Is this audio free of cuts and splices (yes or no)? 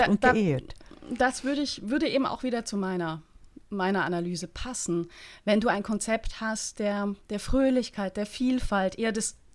yes